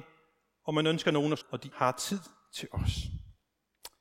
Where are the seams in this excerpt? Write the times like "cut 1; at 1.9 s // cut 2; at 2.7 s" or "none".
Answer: cut 1; at 1.4 s // cut 2; at 1.7 s